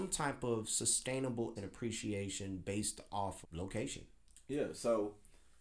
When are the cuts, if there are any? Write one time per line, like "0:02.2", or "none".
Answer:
0:01.6
0:03.4